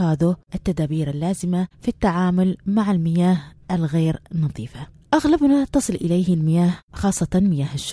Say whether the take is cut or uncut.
uncut